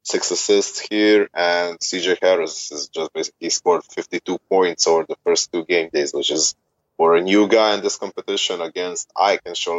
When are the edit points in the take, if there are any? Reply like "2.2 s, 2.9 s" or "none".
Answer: 6.8 s